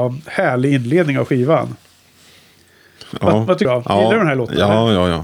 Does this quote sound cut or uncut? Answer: cut